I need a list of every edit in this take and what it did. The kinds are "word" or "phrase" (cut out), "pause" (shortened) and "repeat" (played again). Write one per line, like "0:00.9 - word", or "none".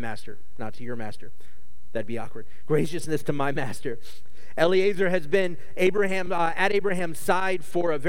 none